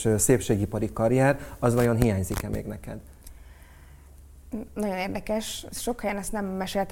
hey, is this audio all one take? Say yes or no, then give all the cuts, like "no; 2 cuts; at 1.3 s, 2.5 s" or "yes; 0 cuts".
yes; 0 cuts